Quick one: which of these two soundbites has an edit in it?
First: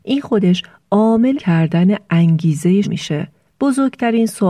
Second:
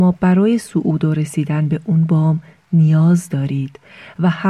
first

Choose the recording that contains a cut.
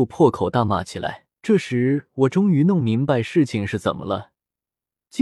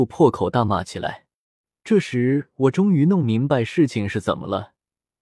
first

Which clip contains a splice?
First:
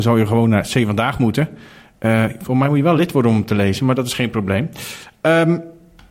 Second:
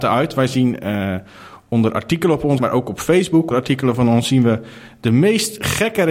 second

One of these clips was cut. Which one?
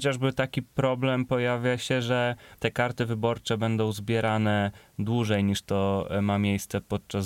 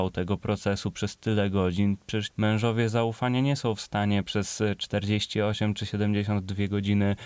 second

